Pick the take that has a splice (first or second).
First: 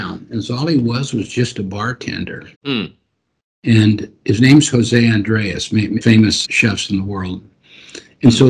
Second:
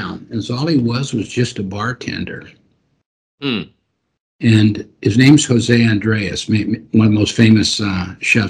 first